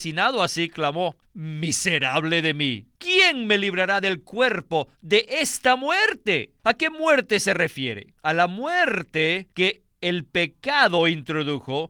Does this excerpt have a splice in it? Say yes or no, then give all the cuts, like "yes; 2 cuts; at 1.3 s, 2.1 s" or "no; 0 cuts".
yes; 5 cuts; at 1.2 s, 3.0 s, 6.6 s, 8.2 s, 9.5 s